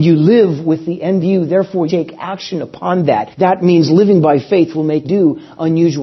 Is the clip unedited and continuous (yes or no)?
no